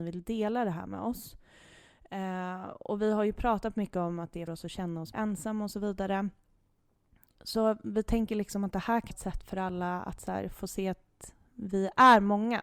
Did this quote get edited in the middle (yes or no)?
yes